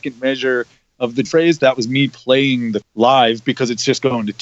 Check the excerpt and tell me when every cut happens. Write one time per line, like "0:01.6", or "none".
0:01.2
0:02.8